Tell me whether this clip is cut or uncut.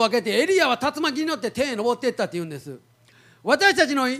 uncut